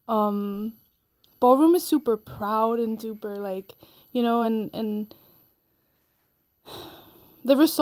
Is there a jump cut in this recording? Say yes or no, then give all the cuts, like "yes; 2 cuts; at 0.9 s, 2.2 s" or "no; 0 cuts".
no; 0 cuts